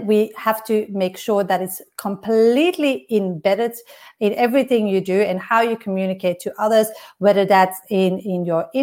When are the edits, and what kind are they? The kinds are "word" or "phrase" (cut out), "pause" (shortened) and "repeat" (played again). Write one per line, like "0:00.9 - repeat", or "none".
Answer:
none